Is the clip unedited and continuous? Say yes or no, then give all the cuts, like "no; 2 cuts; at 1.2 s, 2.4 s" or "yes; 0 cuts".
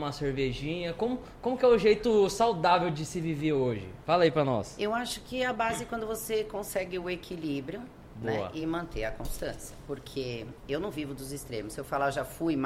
yes; 0 cuts